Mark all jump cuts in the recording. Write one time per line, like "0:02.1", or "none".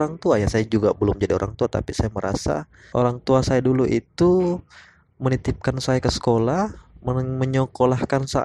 0:02.9